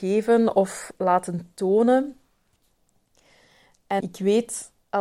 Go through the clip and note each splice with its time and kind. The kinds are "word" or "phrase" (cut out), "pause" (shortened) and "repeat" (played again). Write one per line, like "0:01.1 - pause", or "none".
0:04.0 - word

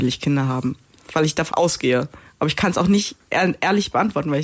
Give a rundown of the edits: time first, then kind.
0:01.5 - word

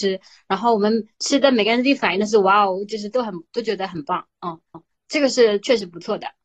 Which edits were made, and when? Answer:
0:04.7 - repeat

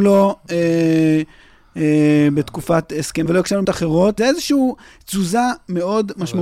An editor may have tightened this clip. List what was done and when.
0:03.3 - word
0:03.6 - word
0:04.2 - word

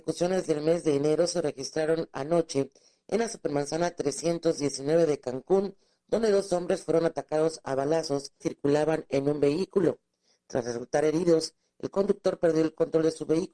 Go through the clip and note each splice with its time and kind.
0:08.4 - word

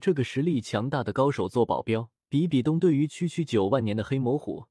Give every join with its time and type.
0:02.2 - pause

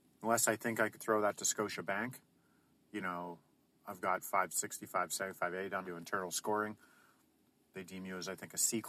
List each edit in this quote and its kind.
0:05.8 - phrase

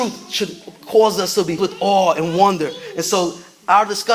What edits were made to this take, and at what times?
0:01.6 - word

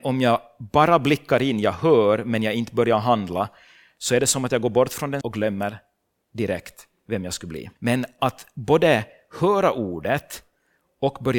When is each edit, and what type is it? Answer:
0:05.2 - word
0:07.8 - pause

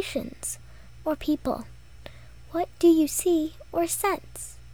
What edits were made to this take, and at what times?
0:01.0 - word

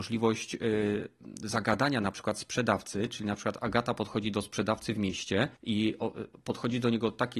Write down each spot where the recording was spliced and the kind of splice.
0:05.6 - pause

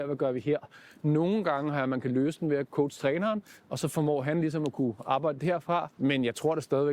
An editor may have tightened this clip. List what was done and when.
0:05.9 - pause

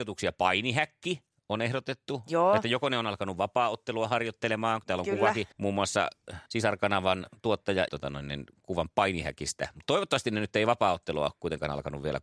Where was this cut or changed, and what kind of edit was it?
0:05.5 - pause
0:06.5 - pause
0:07.9 - phrase

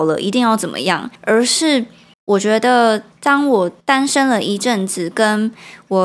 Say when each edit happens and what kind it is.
0:01.2 - pause
0:02.1 - pause
0:03.1 - pause
0:03.8 - pause

